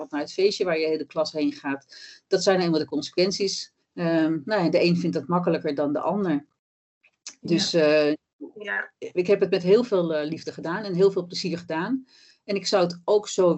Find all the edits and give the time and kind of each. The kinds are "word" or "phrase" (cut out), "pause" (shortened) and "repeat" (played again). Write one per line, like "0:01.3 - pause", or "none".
0:03.8 - pause